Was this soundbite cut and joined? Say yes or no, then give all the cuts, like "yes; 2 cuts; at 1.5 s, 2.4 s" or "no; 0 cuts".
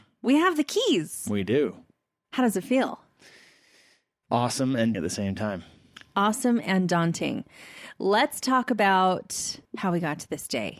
yes; 2 cuts; at 4.9 s, 9.6 s